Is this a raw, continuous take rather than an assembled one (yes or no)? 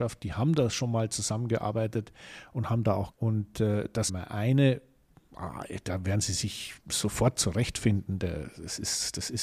no